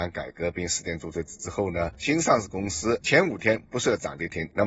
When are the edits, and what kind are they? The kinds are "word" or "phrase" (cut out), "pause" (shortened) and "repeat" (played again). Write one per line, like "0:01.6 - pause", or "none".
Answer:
none